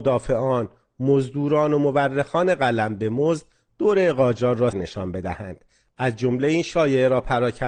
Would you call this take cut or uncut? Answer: cut